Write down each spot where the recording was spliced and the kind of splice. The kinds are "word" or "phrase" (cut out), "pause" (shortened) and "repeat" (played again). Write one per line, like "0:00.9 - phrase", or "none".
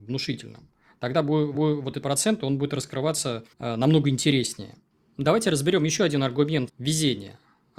0:01.5 - repeat
0:02.0 - phrase
0:03.5 - pause
0:06.7 - word